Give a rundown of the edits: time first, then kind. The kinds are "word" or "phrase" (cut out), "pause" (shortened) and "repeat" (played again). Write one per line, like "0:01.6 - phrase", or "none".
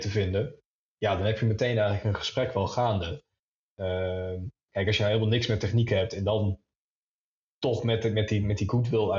none